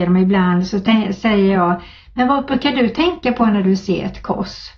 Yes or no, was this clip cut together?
no